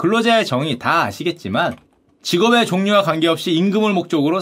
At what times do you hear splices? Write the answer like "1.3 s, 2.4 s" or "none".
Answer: none